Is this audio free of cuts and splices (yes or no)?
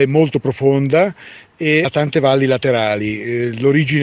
no